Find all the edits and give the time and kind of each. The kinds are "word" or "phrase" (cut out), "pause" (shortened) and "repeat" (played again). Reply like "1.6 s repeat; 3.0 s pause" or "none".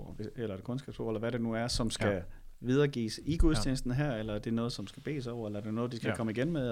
none